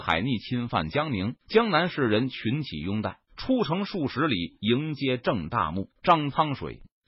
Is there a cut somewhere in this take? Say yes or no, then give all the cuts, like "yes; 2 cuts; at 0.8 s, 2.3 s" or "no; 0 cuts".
yes; 3 cuts; at 1.4 s, 3.3 s, 6.0 s